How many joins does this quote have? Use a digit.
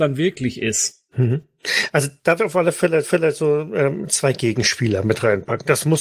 2